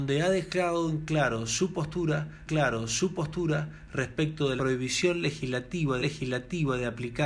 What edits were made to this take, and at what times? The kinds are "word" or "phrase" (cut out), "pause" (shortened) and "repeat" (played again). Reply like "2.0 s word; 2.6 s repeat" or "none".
2.5 s repeat; 4.6 s word; 6.0 s repeat